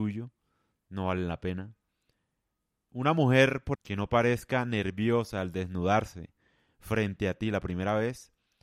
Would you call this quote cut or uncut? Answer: cut